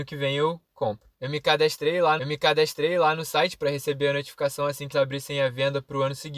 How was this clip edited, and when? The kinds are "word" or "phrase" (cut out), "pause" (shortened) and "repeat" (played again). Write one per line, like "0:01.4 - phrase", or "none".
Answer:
0:01.1 - pause
0:02.2 - repeat
0:04.9 - word